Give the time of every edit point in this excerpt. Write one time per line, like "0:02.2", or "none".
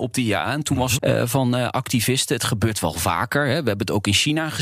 0:01.0